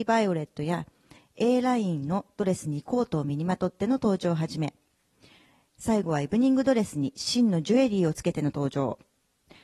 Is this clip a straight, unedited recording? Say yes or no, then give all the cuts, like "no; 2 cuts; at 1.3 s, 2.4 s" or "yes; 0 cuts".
yes; 0 cuts